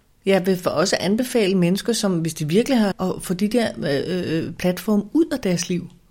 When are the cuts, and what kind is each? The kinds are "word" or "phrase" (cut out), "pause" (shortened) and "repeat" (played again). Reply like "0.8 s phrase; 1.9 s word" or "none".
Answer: 2.9 s phrase